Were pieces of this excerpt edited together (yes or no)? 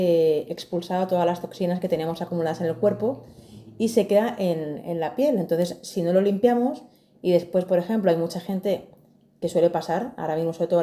no